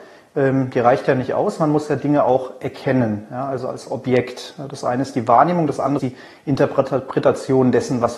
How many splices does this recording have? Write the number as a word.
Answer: one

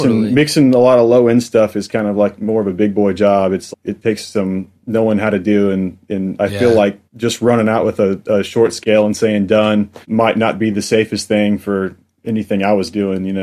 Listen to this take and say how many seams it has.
three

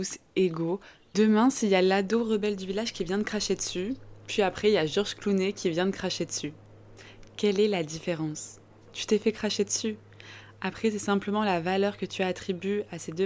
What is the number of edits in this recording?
zero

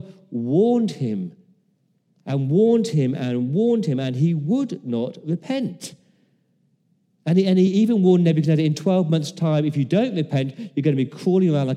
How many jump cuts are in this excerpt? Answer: zero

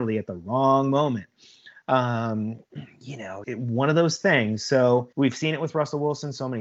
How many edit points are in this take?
two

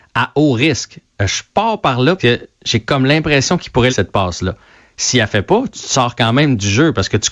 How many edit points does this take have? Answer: two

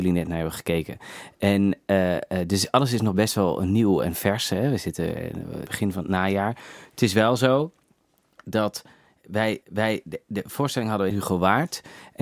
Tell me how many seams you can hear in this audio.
three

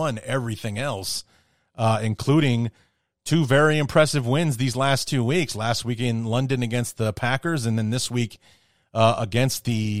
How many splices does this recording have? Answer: zero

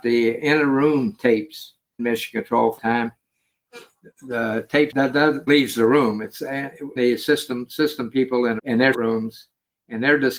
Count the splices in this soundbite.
seven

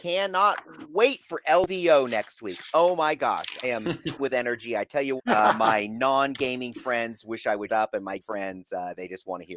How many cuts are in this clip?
five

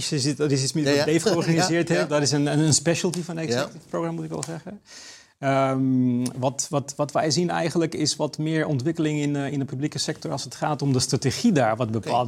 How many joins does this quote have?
zero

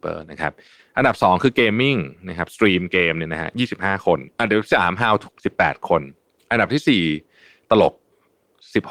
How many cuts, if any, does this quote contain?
two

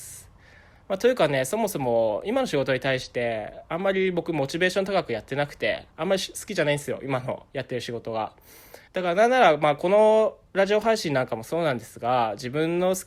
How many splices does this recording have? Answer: three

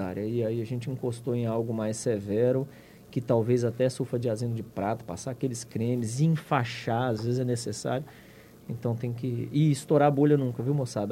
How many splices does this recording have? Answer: zero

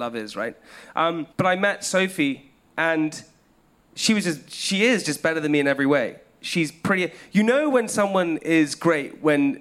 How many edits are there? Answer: one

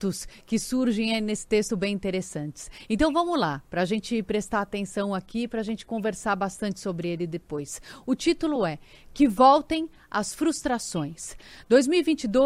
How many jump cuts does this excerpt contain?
zero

